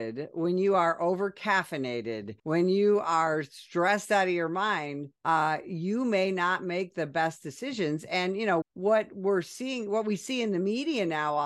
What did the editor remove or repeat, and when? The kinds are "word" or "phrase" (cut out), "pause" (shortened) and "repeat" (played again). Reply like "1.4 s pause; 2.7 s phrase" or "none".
2.4 s pause; 5.2 s pause; 8.6 s word